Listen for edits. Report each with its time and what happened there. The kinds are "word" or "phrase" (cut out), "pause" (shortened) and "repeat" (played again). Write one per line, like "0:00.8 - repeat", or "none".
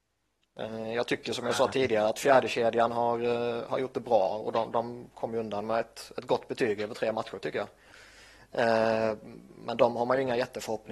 0:09.5 - pause